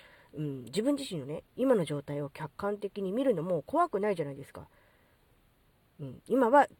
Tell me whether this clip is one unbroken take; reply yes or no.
yes